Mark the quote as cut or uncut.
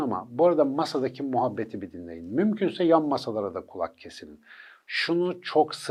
uncut